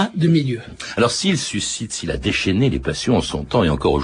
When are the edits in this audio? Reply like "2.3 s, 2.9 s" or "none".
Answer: none

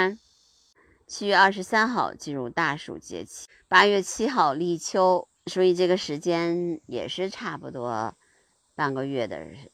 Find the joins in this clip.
5.4 s

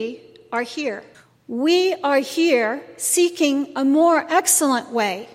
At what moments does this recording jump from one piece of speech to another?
1.1 s

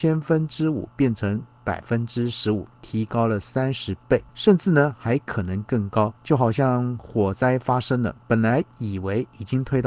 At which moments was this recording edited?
2.7 s, 4.3 s, 6.2 s, 8.2 s

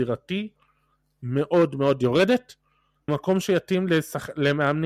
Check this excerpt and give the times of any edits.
3.1 s

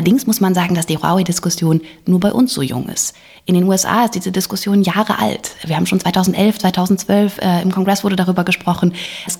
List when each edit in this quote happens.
none

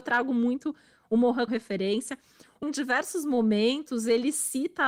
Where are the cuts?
1.5 s, 2.6 s

